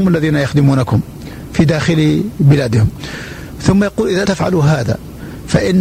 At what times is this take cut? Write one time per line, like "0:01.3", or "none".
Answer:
0:04.3